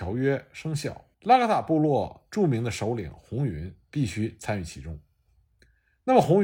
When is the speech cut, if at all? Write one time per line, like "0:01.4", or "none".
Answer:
0:01.1